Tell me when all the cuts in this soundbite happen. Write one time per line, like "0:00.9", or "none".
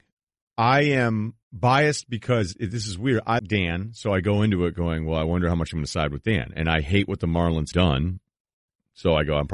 0:01.4
0:03.4
0:07.7

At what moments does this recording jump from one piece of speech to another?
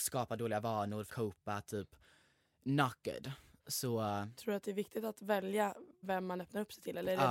0:01.1
0:06.0

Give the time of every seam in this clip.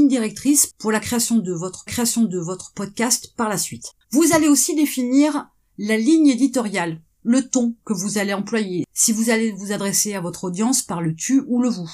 0:01.9
0:04.0

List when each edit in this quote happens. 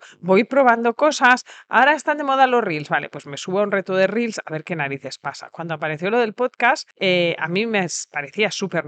none

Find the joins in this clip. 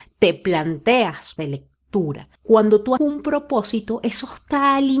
0:01.4
0:02.4
0:03.0

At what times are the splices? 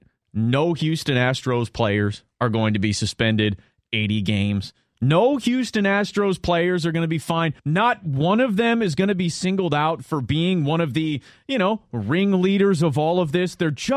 0:07.6

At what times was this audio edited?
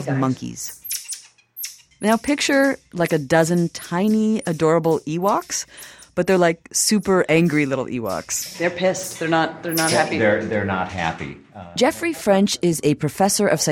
none

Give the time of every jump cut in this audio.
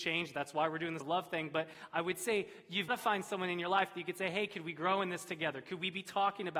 0:01.0
0:02.9

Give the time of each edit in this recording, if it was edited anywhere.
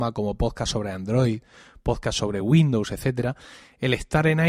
none

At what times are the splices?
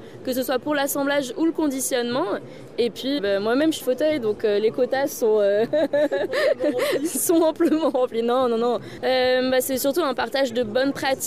0:03.2
0:03.8

